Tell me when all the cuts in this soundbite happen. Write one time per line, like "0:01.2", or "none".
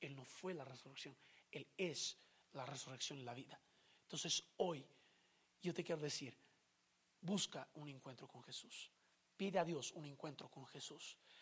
none